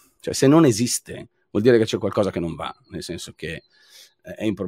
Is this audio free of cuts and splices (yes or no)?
yes